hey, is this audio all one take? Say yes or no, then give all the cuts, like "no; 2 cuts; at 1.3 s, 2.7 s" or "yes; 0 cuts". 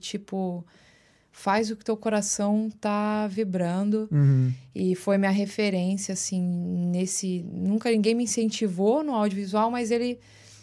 yes; 0 cuts